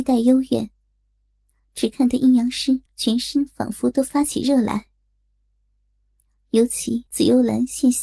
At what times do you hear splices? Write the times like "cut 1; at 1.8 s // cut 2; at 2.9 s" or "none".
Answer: cut 1; at 2.9 s // cut 2; at 7.1 s